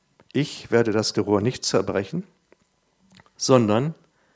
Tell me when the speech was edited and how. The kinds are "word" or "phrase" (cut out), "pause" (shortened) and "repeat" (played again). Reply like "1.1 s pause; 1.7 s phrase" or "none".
1.1 s word